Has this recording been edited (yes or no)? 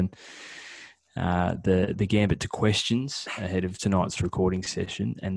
no